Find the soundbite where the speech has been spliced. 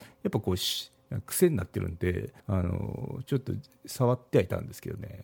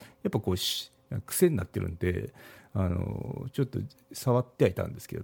first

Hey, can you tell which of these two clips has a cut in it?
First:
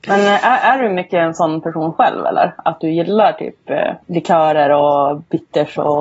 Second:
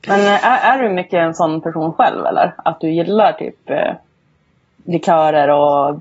first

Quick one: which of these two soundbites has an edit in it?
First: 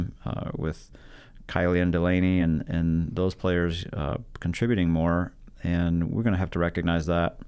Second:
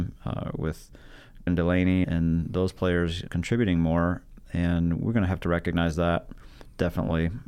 second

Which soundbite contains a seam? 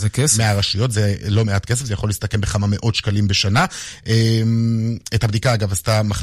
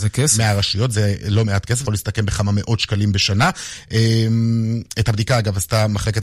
second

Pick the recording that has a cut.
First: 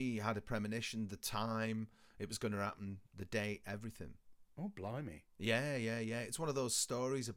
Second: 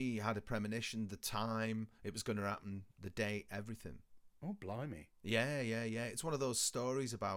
second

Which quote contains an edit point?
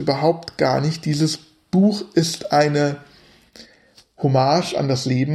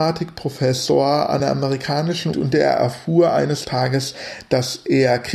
second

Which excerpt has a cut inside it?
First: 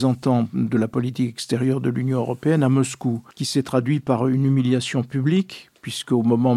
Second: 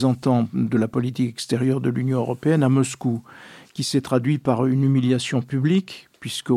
first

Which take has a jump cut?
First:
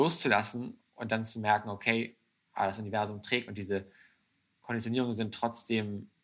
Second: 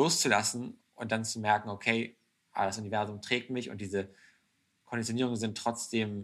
first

